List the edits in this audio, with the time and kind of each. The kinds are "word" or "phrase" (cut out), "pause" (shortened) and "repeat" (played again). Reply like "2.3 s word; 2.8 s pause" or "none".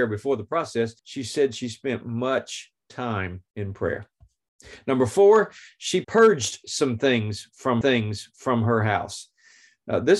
1.0 s pause; 3.5 s pause; 6.0 s word; 7.8 s repeat